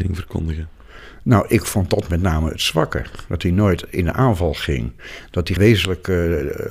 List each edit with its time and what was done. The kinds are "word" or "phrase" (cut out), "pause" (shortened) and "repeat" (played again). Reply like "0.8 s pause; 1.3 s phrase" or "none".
5.6 s word